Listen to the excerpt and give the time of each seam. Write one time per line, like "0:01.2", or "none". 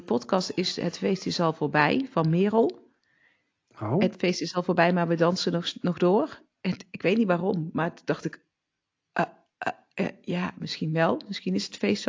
none